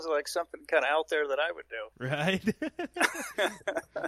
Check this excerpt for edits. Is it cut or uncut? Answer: cut